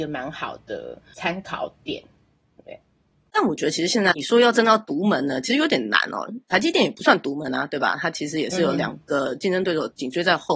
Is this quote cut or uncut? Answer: uncut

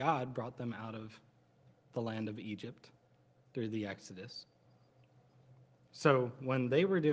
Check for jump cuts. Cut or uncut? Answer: uncut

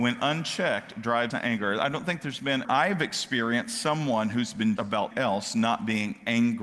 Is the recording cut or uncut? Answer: cut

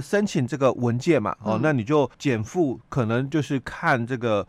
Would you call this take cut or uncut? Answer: cut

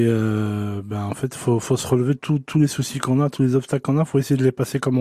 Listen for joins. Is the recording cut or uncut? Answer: cut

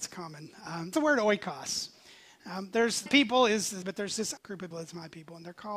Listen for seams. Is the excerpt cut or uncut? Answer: cut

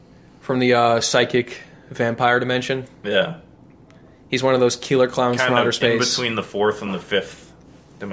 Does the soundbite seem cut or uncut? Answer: uncut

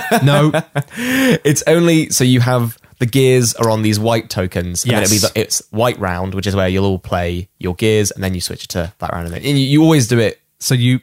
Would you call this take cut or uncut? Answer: uncut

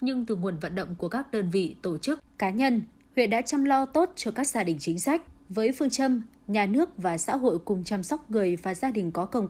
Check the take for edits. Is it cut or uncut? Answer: uncut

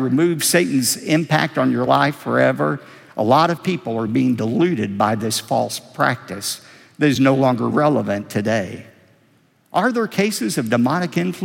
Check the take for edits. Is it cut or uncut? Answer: uncut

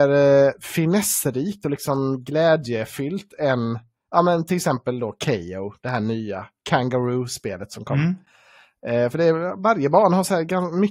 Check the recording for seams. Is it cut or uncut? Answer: uncut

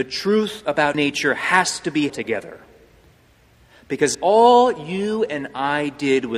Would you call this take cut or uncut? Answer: cut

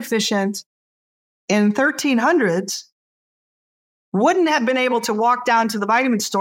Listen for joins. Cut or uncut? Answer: uncut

